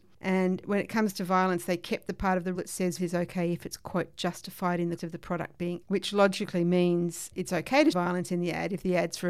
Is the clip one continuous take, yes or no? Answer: no